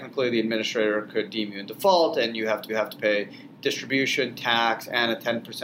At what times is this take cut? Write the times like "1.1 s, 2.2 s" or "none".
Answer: 2.7 s